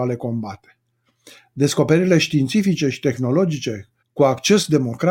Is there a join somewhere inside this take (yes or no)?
yes